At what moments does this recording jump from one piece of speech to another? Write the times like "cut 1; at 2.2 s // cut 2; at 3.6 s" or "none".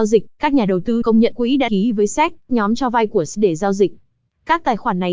cut 1; at 1.0 s // cut 2; at 1.3 s // cut 3; at 1.7 s // cut 4; at 2.5 s // cut 5; at 3.3 s